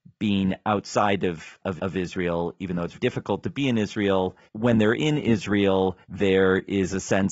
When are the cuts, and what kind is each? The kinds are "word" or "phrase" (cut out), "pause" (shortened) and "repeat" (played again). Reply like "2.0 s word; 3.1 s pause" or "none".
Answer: 1.8 s repeat; 2.9 s word; 4.4 s pause; 6.0 s pause